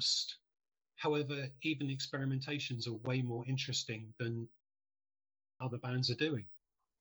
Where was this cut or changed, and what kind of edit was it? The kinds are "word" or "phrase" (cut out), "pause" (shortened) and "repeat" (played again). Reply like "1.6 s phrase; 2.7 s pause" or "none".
none